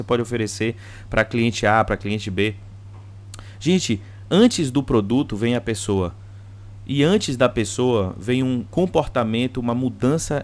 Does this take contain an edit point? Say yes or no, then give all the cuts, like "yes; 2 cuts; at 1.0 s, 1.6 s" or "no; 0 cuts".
no; 0 cuts